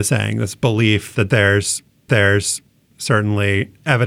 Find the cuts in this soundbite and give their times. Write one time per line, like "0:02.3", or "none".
0:02.1

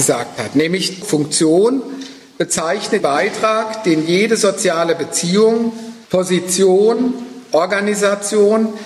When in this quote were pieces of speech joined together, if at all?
0:01.0
0:03.0
0:06.0

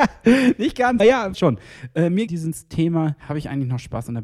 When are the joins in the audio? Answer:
0:01.0
0:01.3
0:02.3
0:03.2

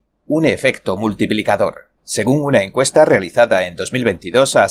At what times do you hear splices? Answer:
0:02.0

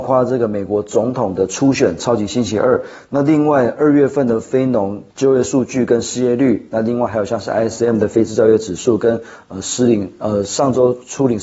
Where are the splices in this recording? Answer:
0:05.1

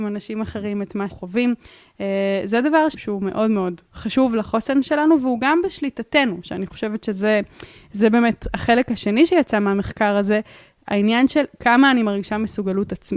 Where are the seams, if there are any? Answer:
0:01.1
0:02.9

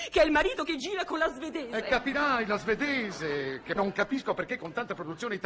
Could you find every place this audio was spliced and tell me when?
0:03.8

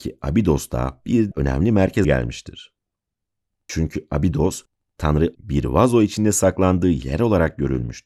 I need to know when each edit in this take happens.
0:01.3
0:02.0
0:05.3

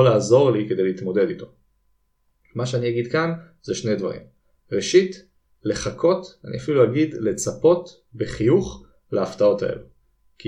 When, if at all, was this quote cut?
none

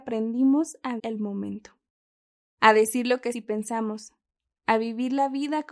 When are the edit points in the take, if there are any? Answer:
0:01.0
0:03.3

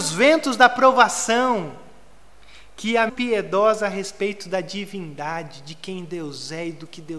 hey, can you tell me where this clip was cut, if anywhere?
0:03.1

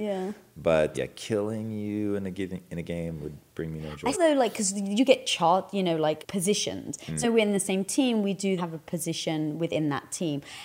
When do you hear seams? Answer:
0:00.9
0:04.1
0:06.2
0:07.2
0:08.6

